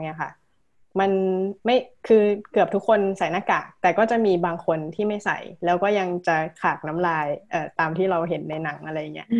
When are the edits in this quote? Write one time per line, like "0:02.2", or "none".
0:01.6